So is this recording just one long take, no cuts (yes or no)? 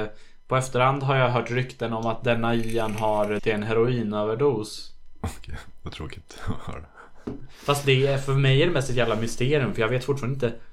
no